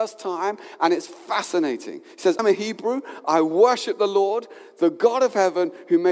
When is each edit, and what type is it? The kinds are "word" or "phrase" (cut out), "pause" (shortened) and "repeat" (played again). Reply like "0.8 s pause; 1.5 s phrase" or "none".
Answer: 2.4 s word